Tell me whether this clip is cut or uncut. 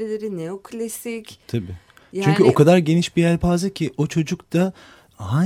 uncut